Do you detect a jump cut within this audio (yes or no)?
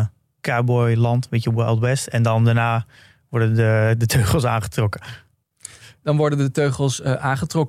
no